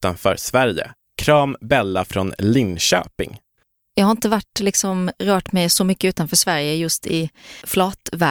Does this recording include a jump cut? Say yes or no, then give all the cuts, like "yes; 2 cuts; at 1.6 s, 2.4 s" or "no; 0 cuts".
no; 0 cuts